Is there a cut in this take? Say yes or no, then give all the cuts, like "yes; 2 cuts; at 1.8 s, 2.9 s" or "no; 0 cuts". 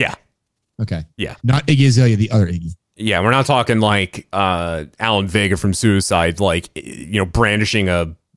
yes; 1 cut; at 1.4 s